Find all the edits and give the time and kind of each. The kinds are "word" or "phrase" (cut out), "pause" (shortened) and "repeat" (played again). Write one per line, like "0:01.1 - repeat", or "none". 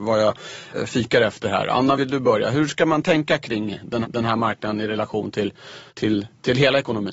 0:04.0 - repeat
0:05.9 - pause

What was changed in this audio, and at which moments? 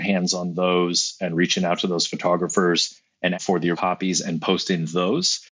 0:03.3 - word
0:03.7 - word

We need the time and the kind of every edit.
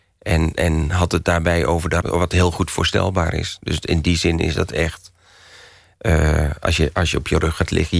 0:02.0 - word

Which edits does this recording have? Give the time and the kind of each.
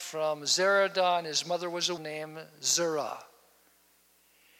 0:02.0 - word

